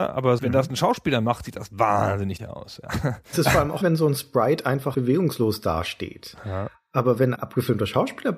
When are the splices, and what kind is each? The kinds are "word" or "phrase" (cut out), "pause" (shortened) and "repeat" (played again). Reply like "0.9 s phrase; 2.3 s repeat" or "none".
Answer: 2.4 s word; 3.3 s word; 3.8 s word; 4.9 s word; 7.3 s word